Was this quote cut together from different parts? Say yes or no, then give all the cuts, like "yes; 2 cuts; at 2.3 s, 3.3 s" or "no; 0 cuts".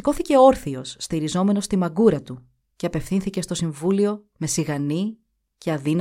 no; 0 cuts